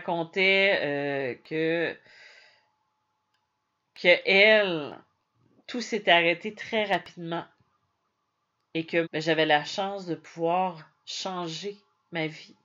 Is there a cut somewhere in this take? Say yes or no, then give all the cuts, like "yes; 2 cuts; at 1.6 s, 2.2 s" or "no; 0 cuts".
yes; 2 cuts; at 5.2 s, 9.0 s